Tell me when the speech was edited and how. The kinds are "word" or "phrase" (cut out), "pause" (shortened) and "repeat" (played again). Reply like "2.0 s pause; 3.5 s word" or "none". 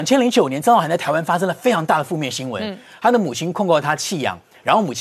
none